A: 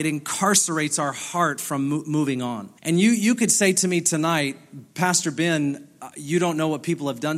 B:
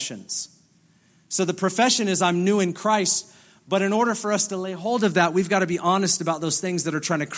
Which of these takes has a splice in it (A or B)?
A